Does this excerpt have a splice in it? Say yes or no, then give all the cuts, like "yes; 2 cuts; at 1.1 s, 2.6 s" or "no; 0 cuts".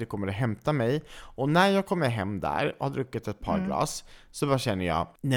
no; 0 cuts